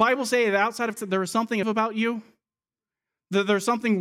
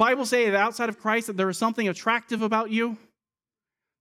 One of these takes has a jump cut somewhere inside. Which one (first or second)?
first